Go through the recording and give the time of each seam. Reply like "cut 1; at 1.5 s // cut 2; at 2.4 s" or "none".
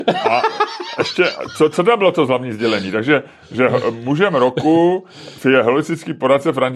none